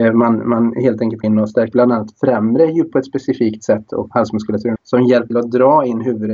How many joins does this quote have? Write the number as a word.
six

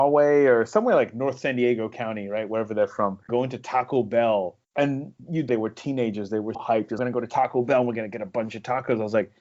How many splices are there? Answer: five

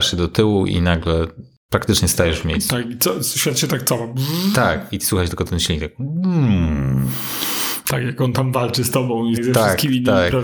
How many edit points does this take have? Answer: one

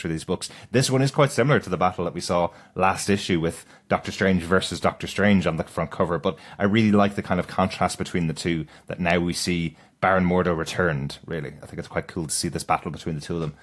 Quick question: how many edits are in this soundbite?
zero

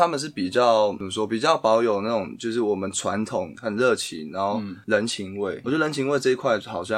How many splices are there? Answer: one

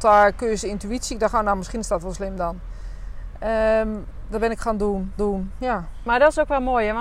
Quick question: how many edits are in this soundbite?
one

